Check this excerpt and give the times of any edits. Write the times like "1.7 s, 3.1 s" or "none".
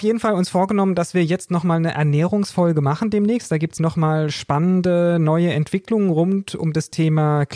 3.8 s